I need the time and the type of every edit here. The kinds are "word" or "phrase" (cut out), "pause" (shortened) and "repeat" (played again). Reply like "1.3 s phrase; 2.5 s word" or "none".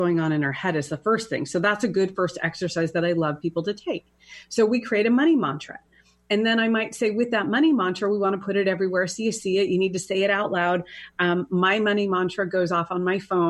none